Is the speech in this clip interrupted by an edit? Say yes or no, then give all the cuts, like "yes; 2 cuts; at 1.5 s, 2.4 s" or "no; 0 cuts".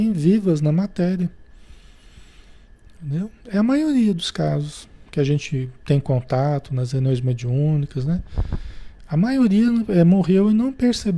no; 0 cuts